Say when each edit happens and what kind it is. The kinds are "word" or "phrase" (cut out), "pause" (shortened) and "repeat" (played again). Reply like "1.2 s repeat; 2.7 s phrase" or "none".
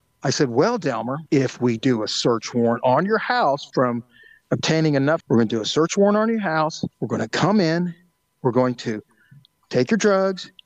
1.3 s pause; 1.8 s word; 3.7 s word; 5.2 s phrase; 6.9 s pause

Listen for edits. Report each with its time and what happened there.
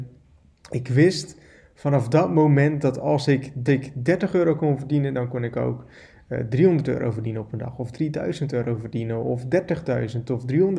3.7 s repeat

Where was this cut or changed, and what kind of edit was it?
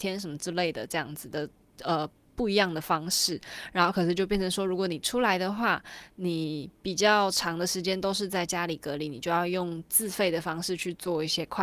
none

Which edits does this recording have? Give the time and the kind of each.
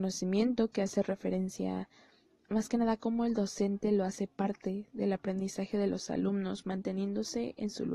none

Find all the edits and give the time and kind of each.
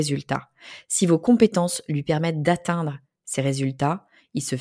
none

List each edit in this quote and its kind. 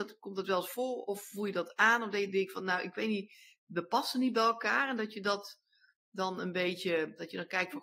none

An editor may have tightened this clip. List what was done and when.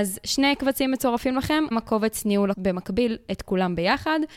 1.7 s word; 2.5 s word

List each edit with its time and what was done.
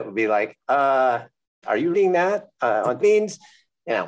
1.6 s word; 1.9 s word; 3.0 s phrase

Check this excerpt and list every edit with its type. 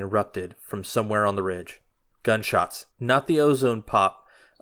2.9 s pause

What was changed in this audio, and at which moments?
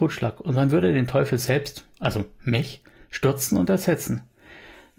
none

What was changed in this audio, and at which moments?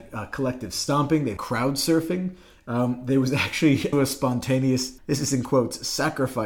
1.4 s word; 3.9 s word; 5.0 s word

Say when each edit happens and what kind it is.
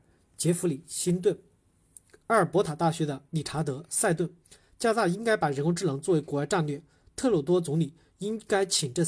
none

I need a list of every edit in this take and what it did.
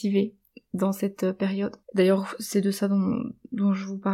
1.8 s pause

